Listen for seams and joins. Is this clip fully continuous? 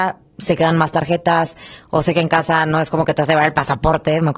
yes; 0 cuts

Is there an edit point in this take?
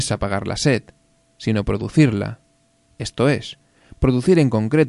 no; 0 cuts

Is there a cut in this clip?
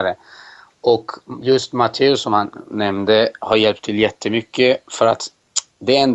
no; 0 cuts

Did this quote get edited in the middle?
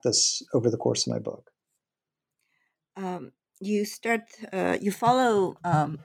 no; 0 cuts

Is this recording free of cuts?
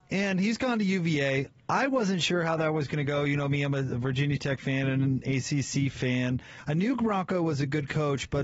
yes; 0 cuts

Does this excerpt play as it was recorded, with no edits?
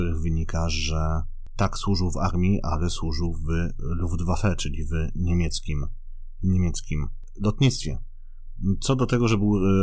yes; 0 cuts

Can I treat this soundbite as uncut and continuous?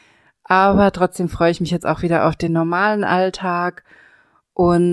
yes; 0 cuts

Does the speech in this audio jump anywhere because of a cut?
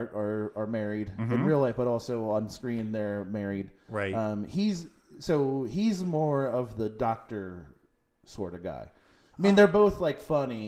no; 0 cuts

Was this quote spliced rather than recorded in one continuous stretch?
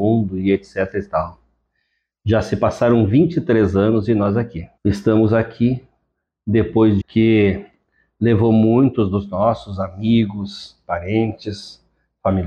yes; 2 cuts; at 4.8 s, 7.0 s

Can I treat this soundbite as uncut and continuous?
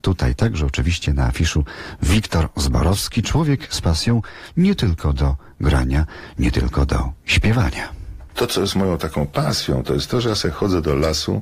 yes; 0 cuts

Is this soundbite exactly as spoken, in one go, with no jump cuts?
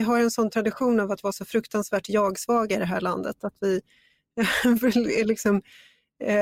yes; 0 cuts

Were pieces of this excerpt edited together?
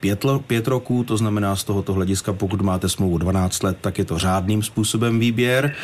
no; 0 cuts

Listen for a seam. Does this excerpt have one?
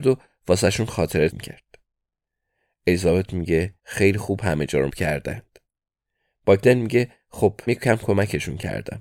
yes; 4 cuts; at 1.3 s, 3.8 s, 4.9 s, 7.7 s

